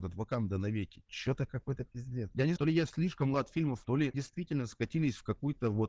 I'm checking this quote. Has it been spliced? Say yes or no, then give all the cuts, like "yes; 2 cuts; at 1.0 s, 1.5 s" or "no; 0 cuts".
yes; 4 cuts; at 2.6 s, 3.3 s, 3.8 s, 4.1 s